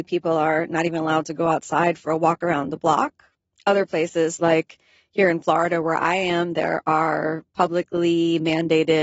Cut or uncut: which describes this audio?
uncut